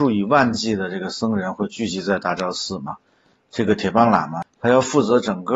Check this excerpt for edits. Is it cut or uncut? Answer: uncut